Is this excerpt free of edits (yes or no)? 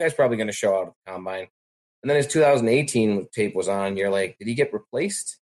yes